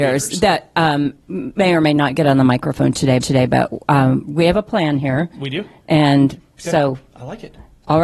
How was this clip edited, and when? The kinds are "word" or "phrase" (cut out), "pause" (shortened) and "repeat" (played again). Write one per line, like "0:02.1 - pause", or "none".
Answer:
0:03.2 - repeat